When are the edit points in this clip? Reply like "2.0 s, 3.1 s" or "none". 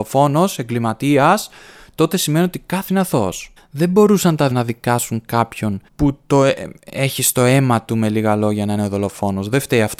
2.9 s, 3.6 s, 4.5 s, 5.9 s

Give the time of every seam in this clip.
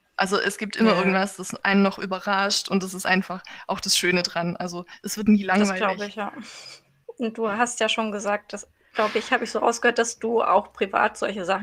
none

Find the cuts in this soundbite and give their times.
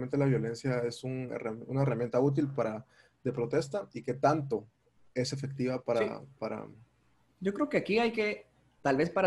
none

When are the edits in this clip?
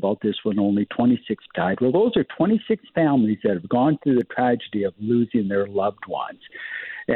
1.5 s

